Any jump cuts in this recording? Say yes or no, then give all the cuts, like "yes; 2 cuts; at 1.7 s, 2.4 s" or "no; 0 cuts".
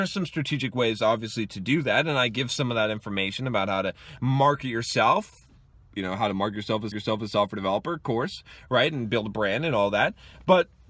yes; 1 cut; at 6.9 s